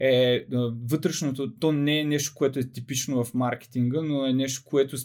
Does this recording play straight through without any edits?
yes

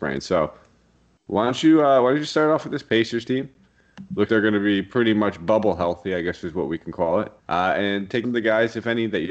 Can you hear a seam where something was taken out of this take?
yes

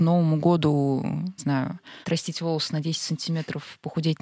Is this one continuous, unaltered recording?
no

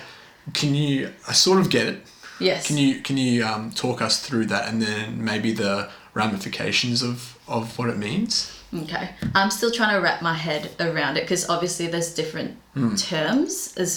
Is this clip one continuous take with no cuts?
yes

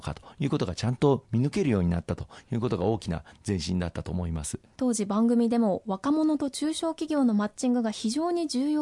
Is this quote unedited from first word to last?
no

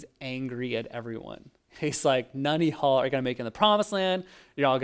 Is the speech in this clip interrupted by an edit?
no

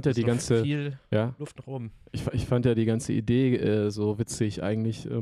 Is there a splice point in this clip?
yes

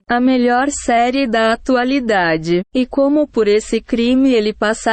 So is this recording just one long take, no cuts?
no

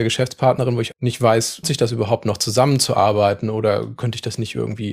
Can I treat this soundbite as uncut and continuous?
no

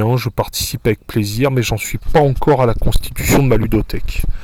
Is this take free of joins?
yes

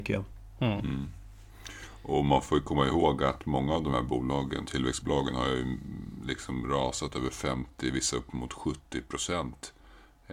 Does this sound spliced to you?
no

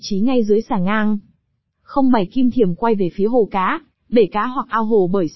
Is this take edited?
no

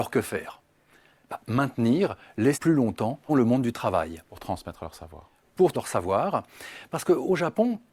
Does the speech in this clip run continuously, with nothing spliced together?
no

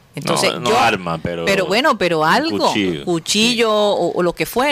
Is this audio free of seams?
yes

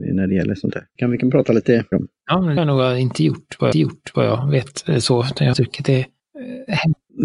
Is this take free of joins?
no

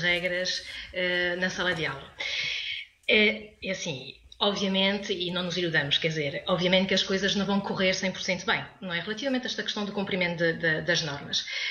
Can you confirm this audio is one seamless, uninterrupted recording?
yes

